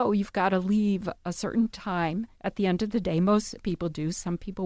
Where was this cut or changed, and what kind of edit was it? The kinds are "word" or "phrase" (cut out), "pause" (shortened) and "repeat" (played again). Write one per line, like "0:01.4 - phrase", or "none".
0:02.3 - pause
0:03.6 - word